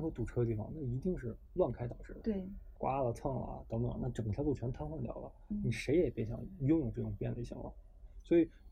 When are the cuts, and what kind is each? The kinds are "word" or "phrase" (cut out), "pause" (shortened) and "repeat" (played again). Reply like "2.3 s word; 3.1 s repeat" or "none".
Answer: 2.8 s word